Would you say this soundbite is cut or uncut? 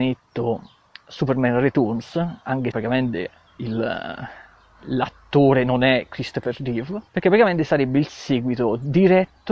cut